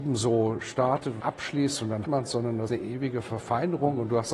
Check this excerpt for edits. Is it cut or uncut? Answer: cut